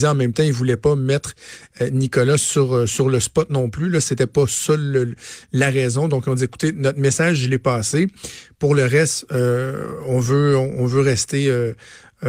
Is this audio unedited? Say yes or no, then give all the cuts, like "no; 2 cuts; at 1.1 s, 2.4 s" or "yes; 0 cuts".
yes; 0 cuts